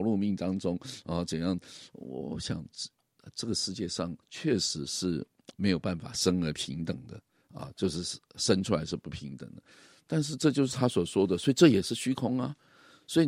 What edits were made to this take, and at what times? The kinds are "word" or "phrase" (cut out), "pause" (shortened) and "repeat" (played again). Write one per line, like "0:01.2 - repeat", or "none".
0:04.2 - pause